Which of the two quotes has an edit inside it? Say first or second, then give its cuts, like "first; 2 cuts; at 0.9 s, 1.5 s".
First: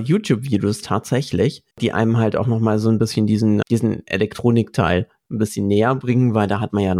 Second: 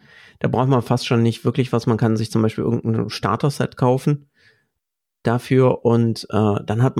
first; 2 cuts; at 1.7 s, 3.6 s